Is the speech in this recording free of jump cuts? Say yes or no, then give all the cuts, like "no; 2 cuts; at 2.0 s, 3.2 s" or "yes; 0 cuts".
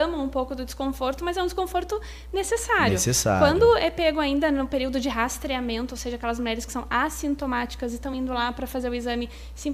yes; 0 cuts